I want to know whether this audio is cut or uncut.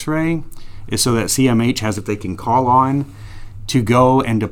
cut